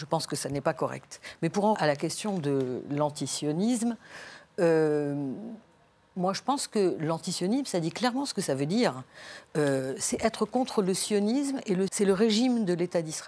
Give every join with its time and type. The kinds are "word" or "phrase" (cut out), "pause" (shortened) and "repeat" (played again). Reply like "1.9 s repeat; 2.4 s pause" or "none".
1.7 s word; 11.9 s word